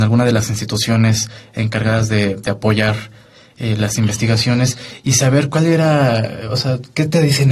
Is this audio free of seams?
yes; 0 cuts

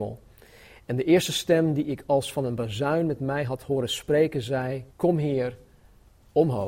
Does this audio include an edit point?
yes; 1 cut; at 4.9 s

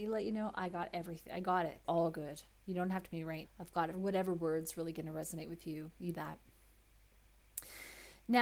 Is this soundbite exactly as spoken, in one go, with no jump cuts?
no; 5 cuts; at 1.8 s, 3.1 s, 3.4 s, 3.9 s, 6.1 s

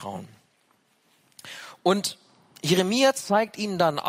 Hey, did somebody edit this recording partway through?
no; 0 cuts

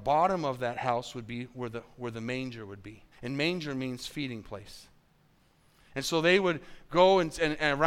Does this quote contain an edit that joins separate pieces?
yes; 1 cut; at 3.1 s

